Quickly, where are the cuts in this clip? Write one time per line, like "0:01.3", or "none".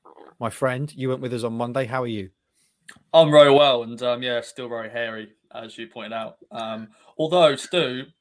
none